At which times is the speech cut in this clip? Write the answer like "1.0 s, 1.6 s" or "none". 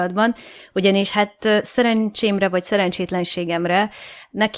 none